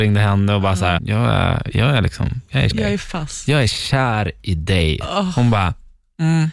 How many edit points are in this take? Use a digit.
2